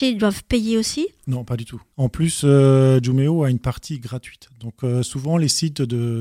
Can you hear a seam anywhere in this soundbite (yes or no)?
no